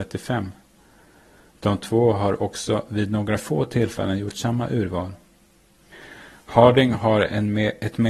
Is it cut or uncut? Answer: uncut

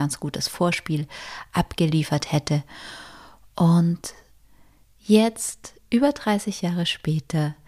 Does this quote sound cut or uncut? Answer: uncut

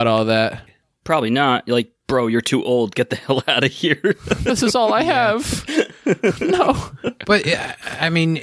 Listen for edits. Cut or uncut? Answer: uncut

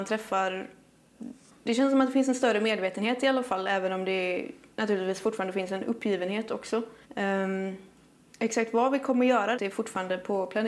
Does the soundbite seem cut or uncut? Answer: cut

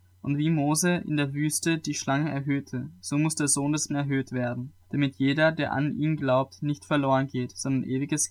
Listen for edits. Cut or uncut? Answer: cut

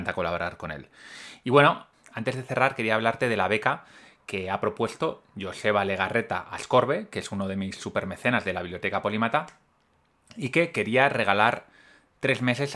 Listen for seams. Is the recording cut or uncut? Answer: uncut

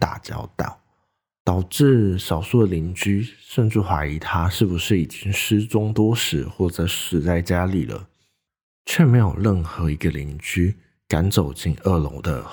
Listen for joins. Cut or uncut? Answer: uncut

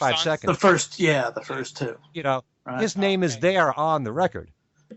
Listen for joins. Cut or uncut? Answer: uncut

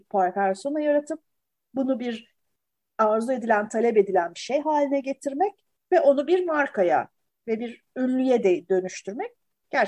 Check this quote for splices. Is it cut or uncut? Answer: uncut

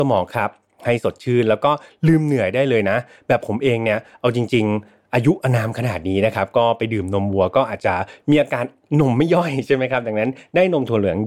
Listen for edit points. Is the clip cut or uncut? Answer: uncut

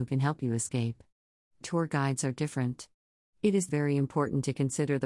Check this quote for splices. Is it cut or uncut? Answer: cut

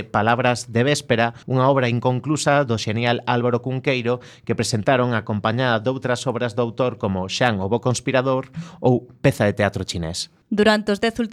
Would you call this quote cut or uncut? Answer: cut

